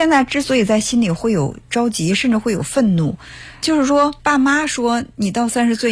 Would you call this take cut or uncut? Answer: cut